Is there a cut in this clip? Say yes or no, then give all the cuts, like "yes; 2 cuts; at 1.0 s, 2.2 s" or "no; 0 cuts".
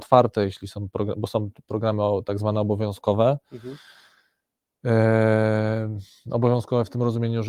no; 0 cuts